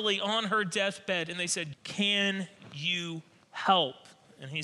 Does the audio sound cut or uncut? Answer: cut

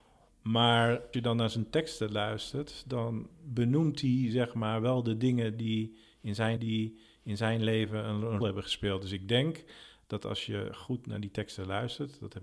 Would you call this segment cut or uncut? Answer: cut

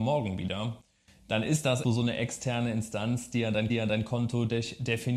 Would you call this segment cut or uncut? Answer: cut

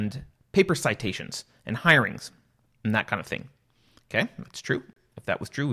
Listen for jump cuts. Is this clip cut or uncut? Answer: uncut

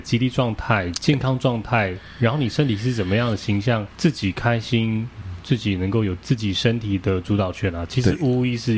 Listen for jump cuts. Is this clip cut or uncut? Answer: cut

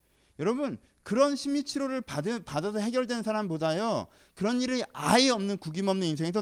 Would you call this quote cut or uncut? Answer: uncut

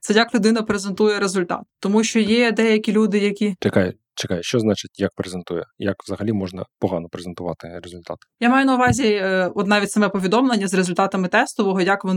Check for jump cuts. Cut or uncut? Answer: uncut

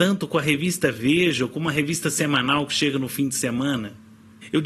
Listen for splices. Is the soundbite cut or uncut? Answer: uncut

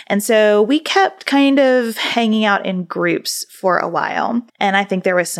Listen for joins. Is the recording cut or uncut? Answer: cut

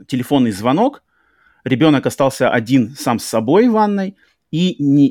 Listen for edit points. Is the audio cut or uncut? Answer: uncut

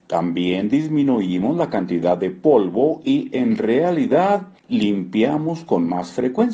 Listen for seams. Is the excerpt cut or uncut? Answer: cut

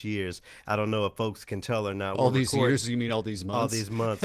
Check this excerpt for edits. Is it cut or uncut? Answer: uncut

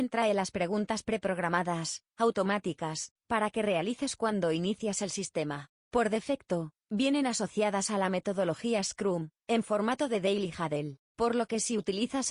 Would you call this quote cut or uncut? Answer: cut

